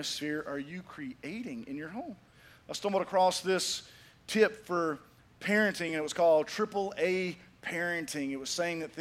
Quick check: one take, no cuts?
yes; 0 cuts

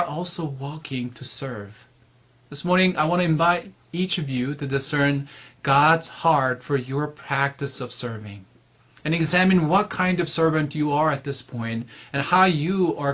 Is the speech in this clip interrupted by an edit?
no; 0 cuts

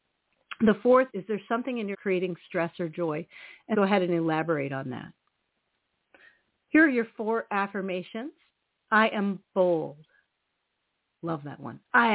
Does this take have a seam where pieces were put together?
yes; 4 cuts; at 1.1 s, 1.9 s, 3.7 s, 8.6 s

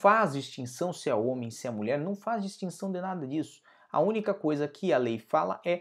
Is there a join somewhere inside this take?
no; 0 cuts

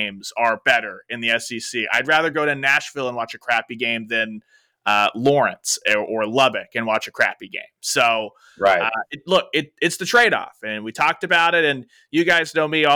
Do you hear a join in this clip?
no; 0 cuts

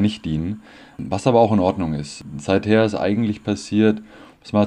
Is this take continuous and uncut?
yes; 0 cuts

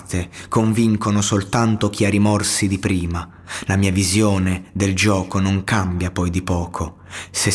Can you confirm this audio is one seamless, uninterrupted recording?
yes; 0 cuts

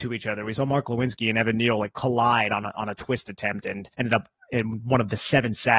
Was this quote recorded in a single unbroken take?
no; 1 cut; at 3.9 s

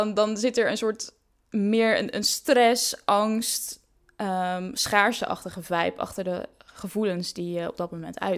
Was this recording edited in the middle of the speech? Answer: no; 0 cuts

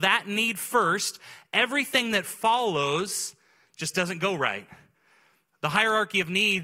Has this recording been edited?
no; 0 cuts

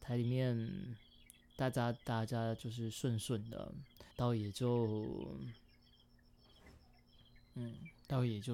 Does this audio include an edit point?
yes; 1 cut; at 4.1 s

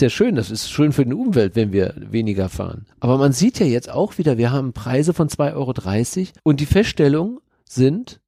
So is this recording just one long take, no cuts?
no; 2 cuts; at 2.9 s, 6.4 s

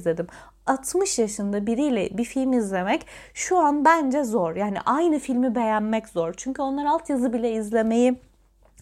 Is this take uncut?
yes; 0 cuts

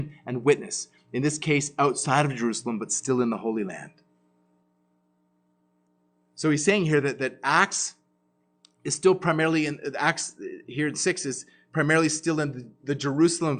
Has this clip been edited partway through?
no; 0 cuts

